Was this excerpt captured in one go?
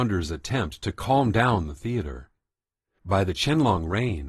yes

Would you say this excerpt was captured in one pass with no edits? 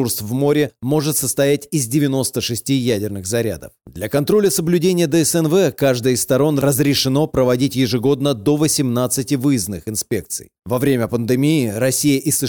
yes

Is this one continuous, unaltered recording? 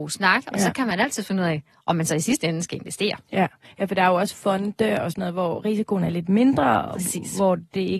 yes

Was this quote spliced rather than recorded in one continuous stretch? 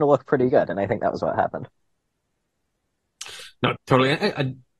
yes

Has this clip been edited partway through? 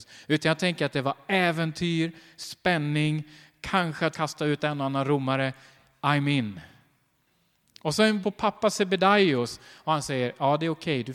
yes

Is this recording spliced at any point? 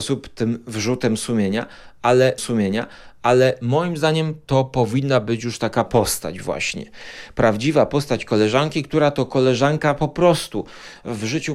yes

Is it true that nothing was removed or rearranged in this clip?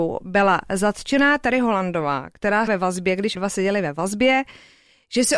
no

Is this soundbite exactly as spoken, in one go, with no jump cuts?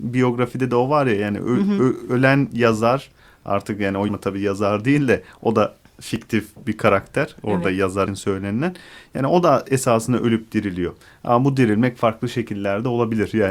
no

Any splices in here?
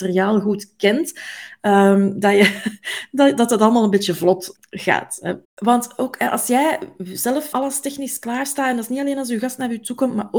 yes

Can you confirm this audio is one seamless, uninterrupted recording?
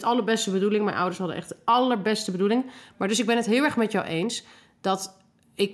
yes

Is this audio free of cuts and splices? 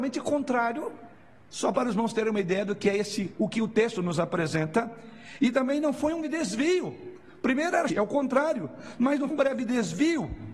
no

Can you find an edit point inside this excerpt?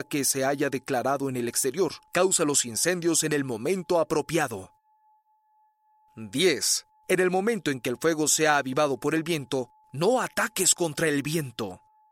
no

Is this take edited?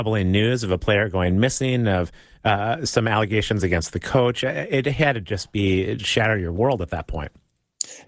yes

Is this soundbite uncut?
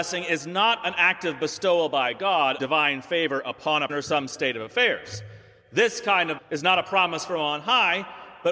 no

